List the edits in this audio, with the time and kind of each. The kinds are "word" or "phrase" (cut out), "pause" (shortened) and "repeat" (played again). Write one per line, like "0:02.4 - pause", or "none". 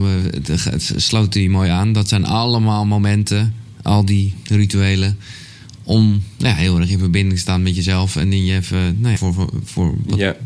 0:09.2 - phrase